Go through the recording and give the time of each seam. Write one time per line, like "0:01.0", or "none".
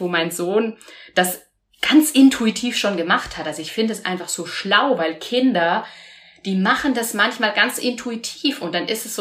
none